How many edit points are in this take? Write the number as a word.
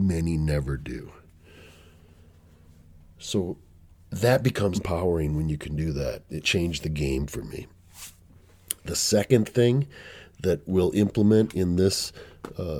two